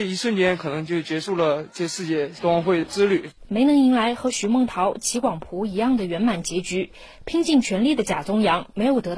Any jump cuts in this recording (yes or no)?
yes